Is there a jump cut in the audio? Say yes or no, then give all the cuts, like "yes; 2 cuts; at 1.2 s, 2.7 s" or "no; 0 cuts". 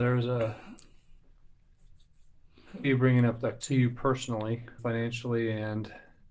yes; 3 cuts; at 2.8 s, 3.6 s, 4.8 s